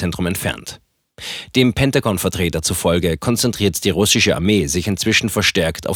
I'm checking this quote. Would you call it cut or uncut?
uncut